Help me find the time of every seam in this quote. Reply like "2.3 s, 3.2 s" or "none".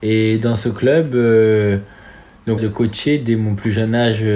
2.6 s